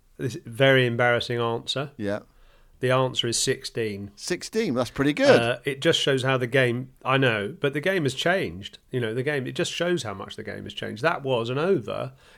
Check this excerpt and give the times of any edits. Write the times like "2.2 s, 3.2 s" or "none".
none